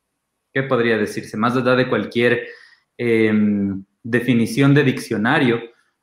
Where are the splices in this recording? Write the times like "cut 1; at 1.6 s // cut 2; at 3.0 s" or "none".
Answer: none